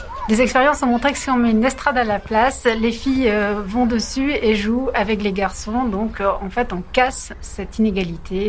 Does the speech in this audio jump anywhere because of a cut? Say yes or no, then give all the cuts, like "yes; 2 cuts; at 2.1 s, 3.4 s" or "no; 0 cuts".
no; 0 cuts